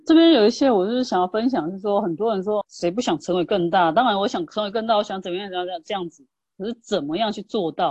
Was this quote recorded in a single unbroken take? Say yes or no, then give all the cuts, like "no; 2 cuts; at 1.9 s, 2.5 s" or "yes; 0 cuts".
no; 1 cut; at 2.6 s